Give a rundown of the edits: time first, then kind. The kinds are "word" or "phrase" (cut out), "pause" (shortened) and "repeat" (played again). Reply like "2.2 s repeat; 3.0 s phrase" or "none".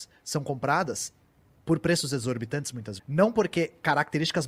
3.0 s word